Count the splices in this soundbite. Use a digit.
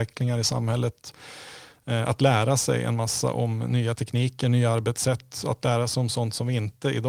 0